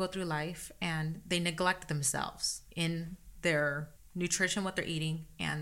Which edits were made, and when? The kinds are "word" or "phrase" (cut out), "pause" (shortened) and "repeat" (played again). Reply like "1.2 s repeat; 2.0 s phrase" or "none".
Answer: 2.7 s pause; 4.0 s pause